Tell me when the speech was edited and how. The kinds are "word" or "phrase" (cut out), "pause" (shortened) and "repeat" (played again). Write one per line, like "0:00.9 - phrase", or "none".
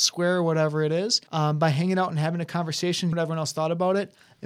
0:01.3 - pause
0:03.1 - word